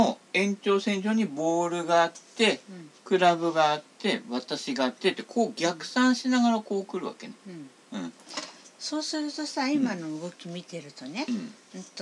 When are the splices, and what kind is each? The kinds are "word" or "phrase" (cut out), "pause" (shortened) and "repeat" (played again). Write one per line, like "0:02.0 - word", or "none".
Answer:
none